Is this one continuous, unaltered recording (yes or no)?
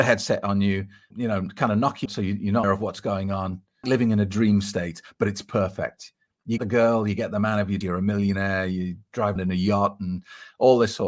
no